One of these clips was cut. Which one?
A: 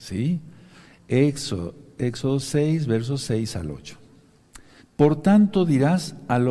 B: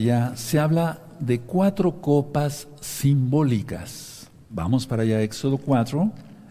A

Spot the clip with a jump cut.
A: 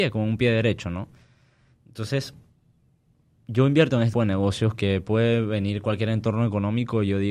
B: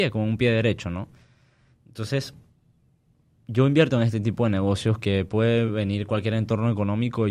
A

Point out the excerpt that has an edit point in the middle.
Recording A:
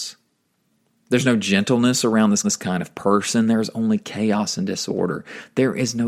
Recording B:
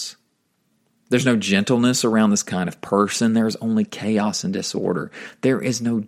A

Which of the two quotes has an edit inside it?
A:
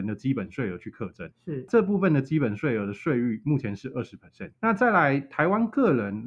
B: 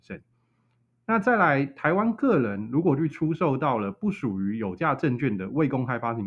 A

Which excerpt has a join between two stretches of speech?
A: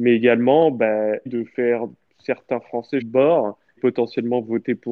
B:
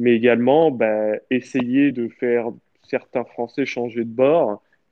A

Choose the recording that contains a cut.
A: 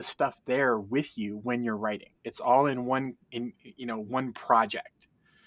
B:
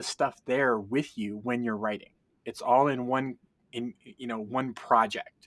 A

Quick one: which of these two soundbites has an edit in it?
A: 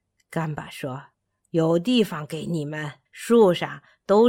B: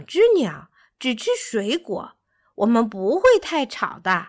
A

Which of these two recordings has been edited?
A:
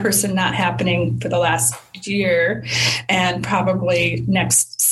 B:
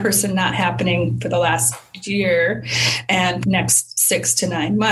B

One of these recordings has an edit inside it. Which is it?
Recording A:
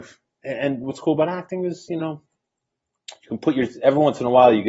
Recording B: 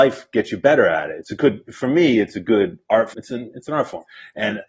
B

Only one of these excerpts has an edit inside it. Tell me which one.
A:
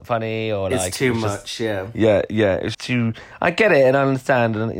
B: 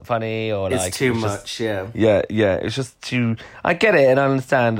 A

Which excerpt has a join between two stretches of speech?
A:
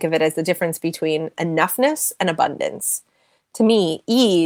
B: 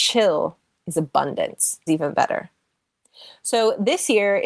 B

